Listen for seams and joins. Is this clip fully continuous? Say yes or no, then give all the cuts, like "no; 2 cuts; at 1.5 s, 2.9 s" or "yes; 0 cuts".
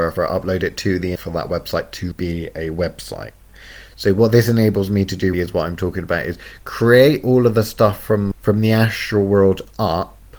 no; 4 cuts; at 1.2 s, 2.1 s, 5.3 s, 8.3 s